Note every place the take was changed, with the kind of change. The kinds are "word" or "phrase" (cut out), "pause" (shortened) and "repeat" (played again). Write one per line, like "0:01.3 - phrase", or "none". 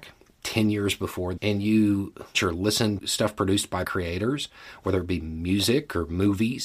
0:01.4 - word
0:02.3 - word
0:03.0 - word
0:03.8 - word